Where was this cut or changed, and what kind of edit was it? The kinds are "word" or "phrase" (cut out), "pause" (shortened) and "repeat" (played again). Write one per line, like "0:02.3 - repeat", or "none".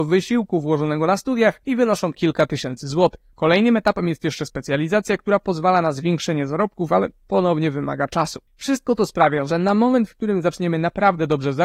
0:01.6 - pause
0:08.5 - pause